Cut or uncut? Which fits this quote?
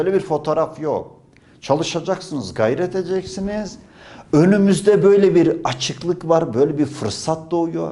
uncut